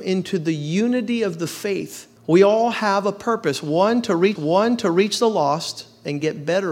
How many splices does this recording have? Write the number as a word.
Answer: two